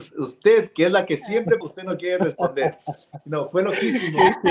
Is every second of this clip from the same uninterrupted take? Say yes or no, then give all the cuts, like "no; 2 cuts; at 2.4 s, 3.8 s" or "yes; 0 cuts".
no; 1 cut; at 1.6 s